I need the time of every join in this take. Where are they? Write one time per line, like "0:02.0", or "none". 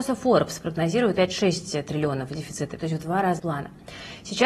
0:01.1
0:02.8
0:03.4